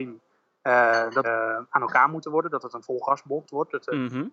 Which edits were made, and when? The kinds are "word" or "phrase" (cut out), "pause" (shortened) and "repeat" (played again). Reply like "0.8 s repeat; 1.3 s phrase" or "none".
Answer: 1.2 s word